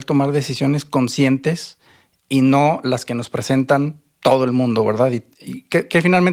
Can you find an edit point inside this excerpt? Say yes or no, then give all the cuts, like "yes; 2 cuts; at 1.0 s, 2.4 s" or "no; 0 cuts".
no; 0 cuts